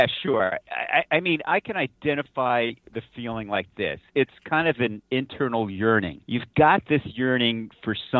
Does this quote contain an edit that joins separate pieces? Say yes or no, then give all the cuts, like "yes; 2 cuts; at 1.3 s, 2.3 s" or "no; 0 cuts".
yes; 1 cut; at 6.2 s